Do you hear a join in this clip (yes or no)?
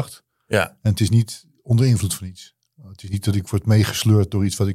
no